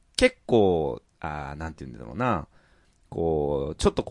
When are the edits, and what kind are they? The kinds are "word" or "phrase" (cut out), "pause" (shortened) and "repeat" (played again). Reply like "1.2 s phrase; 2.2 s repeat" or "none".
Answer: 1.1 s pause